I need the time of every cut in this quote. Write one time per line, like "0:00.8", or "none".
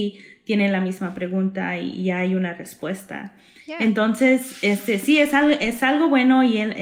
none